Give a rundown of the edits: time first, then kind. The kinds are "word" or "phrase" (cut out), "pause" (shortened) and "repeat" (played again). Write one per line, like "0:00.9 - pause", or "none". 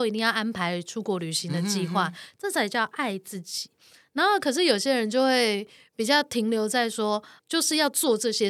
0:07.4 - word